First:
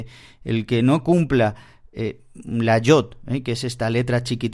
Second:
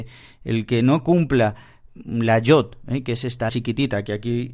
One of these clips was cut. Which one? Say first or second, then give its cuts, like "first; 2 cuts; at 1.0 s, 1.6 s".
second; 2 cuts; at 1.9 s, 3.5 s